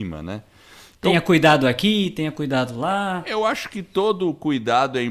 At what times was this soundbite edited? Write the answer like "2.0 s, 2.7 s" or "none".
none